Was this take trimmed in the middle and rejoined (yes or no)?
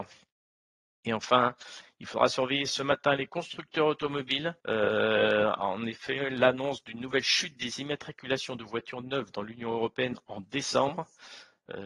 yes